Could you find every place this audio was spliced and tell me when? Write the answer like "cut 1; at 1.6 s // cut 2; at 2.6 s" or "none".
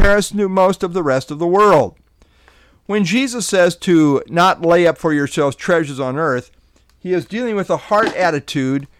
none